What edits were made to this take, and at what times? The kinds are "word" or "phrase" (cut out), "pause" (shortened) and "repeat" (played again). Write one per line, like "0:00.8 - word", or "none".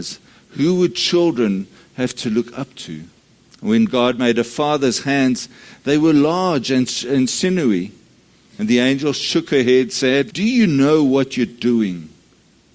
0:03.3 - pause
0:10.3 - phrase